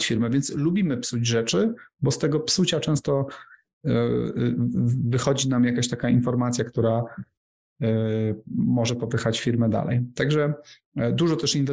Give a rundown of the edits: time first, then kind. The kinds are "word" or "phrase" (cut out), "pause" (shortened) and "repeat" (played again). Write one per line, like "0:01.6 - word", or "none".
none